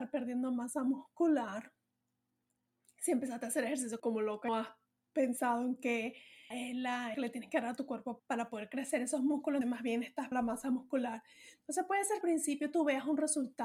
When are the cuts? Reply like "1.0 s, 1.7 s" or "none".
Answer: 4.0 s, 4.5 s, 6.5 s, 7.1 s, 8.2 s, 9.6 s, 10.3 s, 12.2 s